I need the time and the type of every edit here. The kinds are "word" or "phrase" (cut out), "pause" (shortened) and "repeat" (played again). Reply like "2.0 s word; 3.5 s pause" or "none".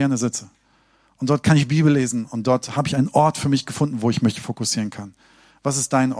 none